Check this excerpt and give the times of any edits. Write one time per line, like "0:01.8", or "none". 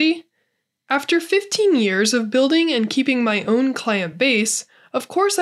none